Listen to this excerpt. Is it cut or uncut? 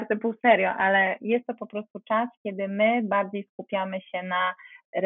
uncut